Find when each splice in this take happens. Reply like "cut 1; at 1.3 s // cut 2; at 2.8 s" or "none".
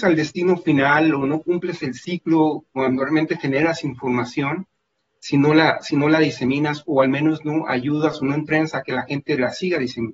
none